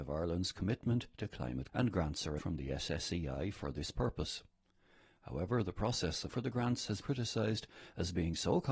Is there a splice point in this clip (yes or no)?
yes